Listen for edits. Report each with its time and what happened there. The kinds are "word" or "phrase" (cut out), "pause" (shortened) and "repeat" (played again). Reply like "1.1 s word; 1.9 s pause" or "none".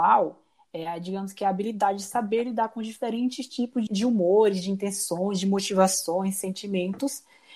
3.9 s word